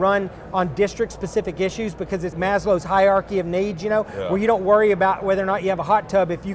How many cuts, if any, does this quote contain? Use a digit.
1